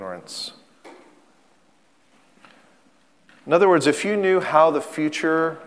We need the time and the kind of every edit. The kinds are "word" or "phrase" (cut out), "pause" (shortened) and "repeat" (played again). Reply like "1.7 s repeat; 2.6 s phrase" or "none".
none